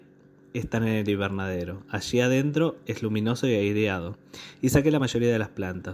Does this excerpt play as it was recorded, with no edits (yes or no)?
yes